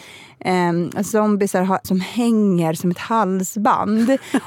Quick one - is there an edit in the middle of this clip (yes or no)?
yes